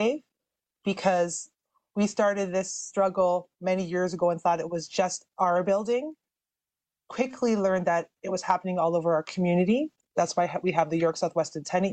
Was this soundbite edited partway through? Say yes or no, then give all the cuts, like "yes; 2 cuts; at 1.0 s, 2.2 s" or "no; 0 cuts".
no; 0 cuts